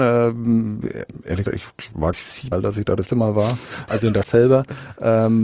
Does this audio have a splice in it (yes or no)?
yes